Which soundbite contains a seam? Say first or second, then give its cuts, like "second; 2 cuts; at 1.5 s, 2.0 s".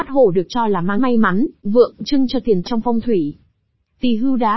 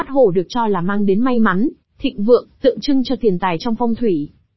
first; 4 cuts; at 1.0 s, 1.6 s, 2.0 s, 2.6 s